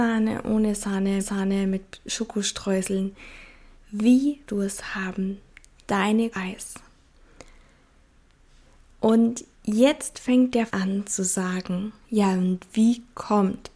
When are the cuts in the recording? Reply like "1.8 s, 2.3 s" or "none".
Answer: 1.2 s, 4.5 s, 6.3 s, 9.5 s, 10.7 s, 12.0 s